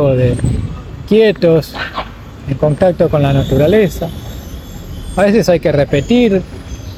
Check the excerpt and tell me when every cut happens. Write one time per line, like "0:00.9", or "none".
none